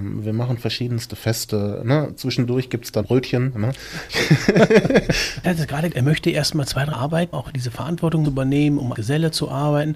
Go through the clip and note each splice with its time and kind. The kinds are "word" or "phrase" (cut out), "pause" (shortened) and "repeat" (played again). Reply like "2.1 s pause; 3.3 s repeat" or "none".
3.0 s word; 5.4 s phrase; 5.9 s word; 6.9 s word; 7.3 s word; 8.2 s phrase; 8.9 s word